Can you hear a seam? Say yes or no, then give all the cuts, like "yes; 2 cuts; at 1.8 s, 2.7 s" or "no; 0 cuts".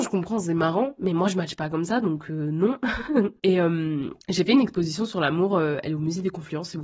yes; 1 cut; at 4.2 s